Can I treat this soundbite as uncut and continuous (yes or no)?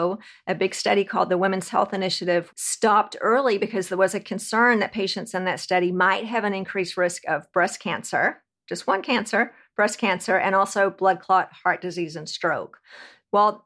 no